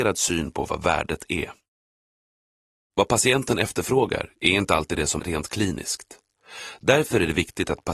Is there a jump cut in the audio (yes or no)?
yes